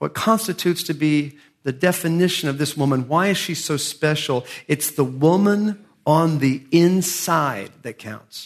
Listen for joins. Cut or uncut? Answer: uncut